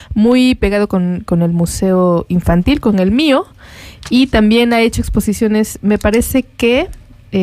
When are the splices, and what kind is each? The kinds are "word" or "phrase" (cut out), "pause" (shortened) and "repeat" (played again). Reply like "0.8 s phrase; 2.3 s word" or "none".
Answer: none